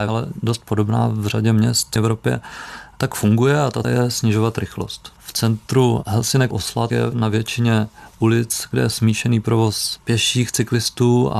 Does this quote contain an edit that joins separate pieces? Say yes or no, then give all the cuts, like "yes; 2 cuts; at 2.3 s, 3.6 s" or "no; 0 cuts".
yes; 3 cuts; at 2.0 s, 3.8 s, 6.5 s